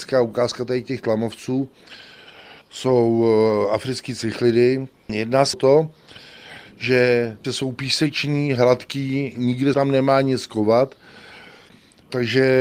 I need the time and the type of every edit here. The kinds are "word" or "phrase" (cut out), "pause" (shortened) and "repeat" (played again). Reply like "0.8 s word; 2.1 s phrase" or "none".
2.6 s pause; 5.5 s word; 7.4 s phrase; 9.7 s word

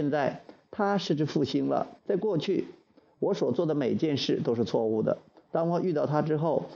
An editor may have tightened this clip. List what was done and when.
2.0 s pause

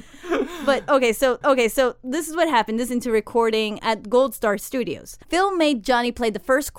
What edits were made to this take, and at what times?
1.4 s repeat; 2.9 s phrase; 3.8 s word; 5.2 s pause

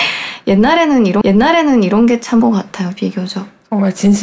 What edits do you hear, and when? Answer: 1.2 s repeat; 2.4 s word

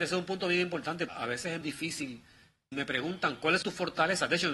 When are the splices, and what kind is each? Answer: 1.1 s word; 1.6 s word; 2.7 s word; 3.6 s word

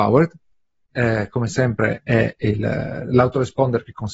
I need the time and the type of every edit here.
0.9 s word

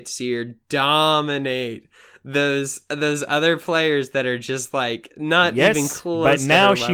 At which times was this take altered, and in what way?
none

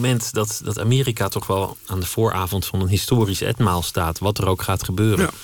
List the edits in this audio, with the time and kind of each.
none

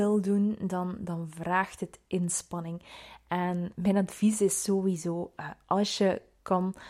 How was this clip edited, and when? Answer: 3.7 s word

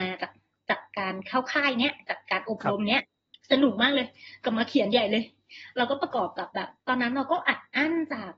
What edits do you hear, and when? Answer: 3.3 s pause; 6.8 s pause

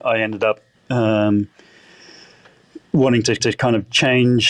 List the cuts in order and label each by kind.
3.4 s repeat

